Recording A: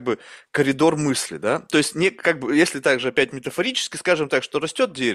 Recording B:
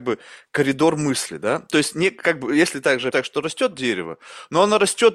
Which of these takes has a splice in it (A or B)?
B